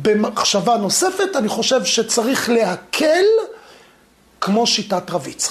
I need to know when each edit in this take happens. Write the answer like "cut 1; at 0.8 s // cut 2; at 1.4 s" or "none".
none